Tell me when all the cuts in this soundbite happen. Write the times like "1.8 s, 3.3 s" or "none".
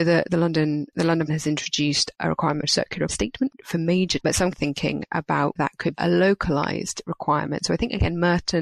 1.3 s, 2.6 s, 3.1 s, 4.2 s, 4.5 s, 5.6 s, 5.9 s